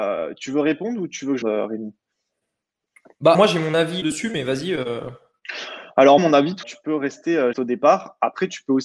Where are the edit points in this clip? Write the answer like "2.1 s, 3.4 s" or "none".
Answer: 1.4 s, 3.3 s, 4.0 s, 6.2 s, 6.6 s, 7.5 s